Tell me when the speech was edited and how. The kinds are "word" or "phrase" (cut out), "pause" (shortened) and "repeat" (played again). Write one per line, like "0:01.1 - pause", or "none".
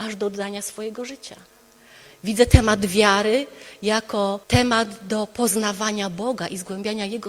0:04.4 - pause